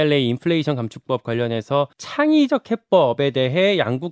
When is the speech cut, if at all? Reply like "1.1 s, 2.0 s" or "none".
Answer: 1.9 s